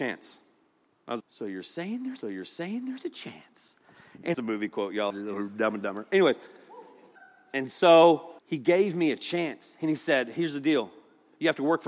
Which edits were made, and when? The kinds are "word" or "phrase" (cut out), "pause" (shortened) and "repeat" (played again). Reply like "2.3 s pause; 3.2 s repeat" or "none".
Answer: 1.2 s word; 2.2 s repeat; 4.3 s phrase; 5.1 s phrase; 7.2 s pause; 8.4 s pause